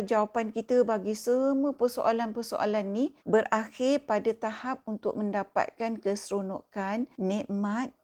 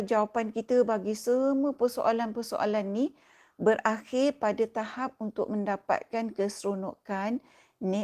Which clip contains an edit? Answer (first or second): first